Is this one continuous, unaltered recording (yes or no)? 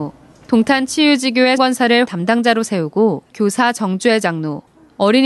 no